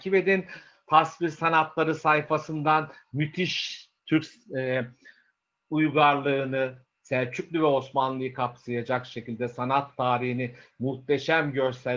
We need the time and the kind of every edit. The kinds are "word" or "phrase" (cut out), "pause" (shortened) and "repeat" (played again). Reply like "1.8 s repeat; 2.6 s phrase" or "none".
none